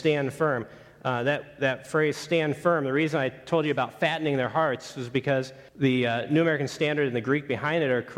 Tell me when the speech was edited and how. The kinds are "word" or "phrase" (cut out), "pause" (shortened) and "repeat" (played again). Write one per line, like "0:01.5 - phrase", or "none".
0:05.7 - pause